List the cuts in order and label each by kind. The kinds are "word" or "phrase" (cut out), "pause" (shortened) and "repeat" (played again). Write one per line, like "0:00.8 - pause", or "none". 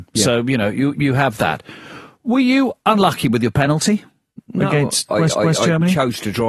0:00.9 - word
0:04.3 - pause
0:05.3 - repeat

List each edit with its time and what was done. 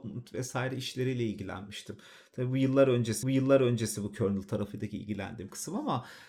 0:03.2 - repeat

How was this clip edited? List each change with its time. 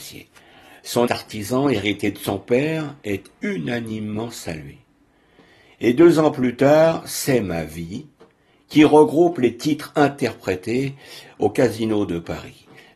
0:01.1 - word

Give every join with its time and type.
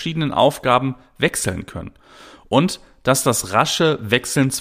none

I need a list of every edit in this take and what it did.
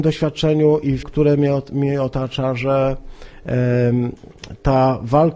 0:01.0 - word

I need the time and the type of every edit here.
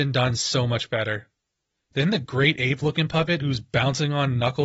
none

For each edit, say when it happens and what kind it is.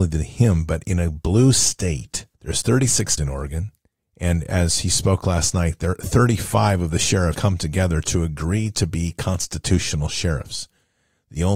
0:02.3 - pause
0:03.2 - word
0:04.0 - pause
0:07.3 - word

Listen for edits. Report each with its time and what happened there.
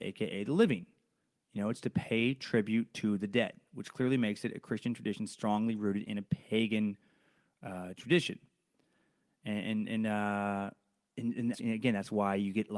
0:11.5 - phrase

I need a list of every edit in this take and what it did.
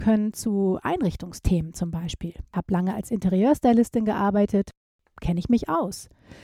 none

